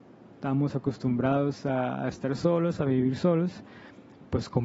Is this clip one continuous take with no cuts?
yes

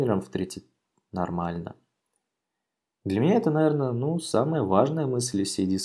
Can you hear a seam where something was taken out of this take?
no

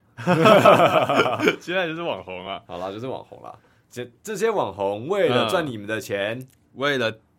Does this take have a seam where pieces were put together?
no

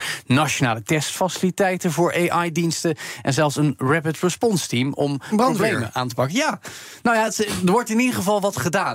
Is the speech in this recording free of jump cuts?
yes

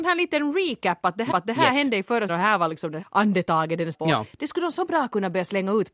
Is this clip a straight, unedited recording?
no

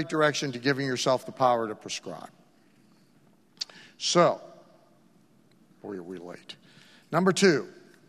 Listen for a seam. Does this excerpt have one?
no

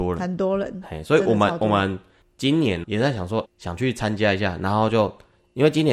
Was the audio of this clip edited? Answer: yes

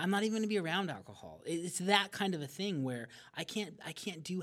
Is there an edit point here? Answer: no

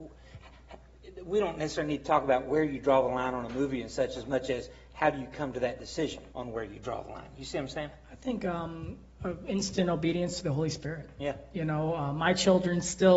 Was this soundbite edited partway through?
yes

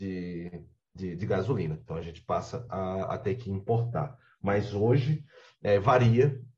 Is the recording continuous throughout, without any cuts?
yes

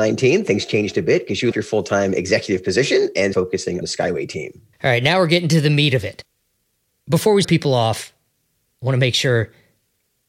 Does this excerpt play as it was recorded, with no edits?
no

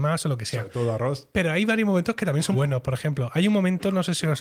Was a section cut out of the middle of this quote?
yes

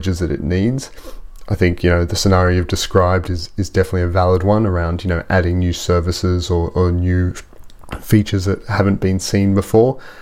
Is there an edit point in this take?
no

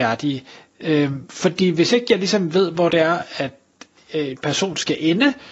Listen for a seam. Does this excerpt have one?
no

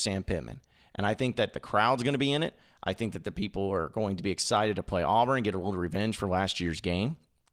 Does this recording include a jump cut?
no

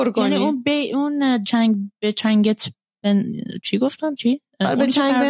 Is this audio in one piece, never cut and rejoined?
no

